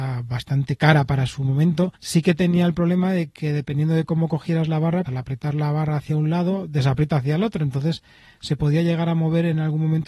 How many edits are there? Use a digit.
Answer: 2